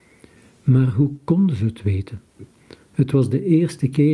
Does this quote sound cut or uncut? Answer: uncut